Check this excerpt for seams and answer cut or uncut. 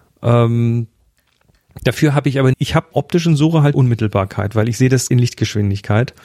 cut